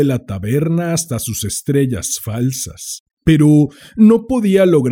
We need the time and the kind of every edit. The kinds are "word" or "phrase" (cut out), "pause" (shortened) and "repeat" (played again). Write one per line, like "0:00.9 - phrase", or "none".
0:03.2 - pause